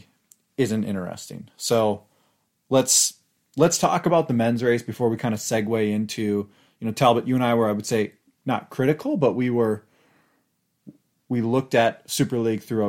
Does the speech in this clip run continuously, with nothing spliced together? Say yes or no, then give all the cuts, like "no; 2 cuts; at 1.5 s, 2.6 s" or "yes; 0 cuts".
yes; 0 cuts